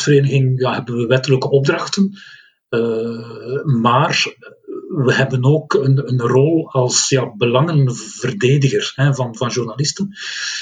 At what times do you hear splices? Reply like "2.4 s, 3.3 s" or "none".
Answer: none